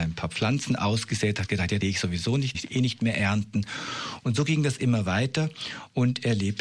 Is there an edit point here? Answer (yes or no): yes